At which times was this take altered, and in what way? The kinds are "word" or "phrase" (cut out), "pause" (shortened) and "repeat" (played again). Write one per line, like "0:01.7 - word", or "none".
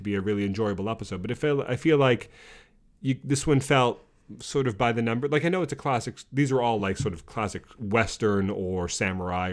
none